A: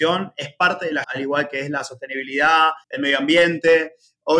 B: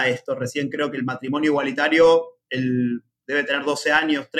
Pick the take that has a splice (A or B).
A